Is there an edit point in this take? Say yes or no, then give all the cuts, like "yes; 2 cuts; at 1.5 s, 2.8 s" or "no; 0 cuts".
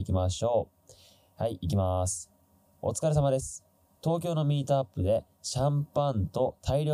no; 0 cuts